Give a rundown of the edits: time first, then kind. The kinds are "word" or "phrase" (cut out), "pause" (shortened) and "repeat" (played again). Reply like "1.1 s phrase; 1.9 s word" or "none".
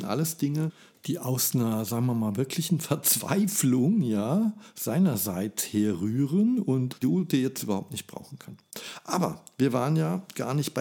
7.0 s word